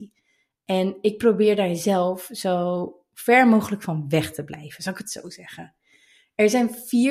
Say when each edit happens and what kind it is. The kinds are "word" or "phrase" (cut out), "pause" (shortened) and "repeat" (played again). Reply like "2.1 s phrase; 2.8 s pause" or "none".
none

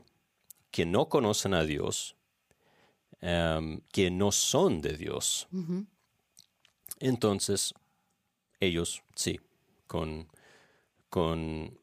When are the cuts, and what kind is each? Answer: 3.9 s pause; 9.1 s pause

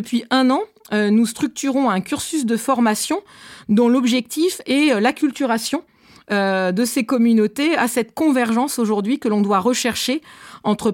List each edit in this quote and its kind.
none

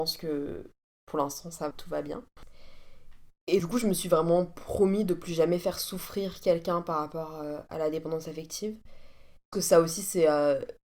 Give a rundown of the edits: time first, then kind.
1.7 s word; 3.6 s word; 9.5 s phrase

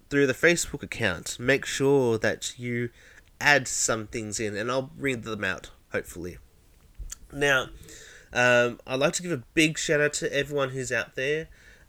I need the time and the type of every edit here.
none

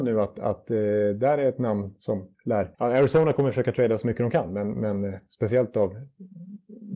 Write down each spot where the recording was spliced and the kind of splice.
2.7 s pause

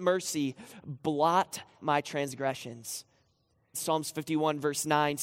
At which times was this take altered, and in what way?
1.8 s word; 3.7 s phrase

